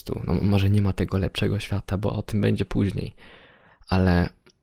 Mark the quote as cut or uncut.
uncut